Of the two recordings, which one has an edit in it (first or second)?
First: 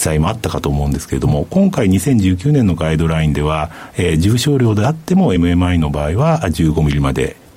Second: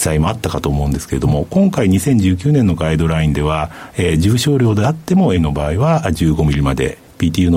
second